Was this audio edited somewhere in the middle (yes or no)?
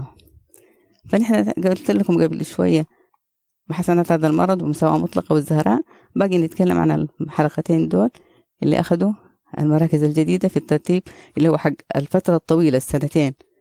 no